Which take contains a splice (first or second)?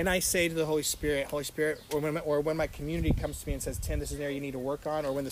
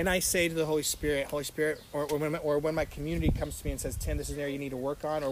first